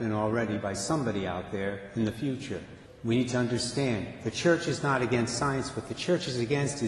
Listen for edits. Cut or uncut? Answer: cut